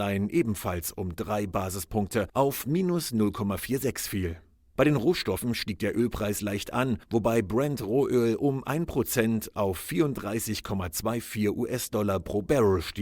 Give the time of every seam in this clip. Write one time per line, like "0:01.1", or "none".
none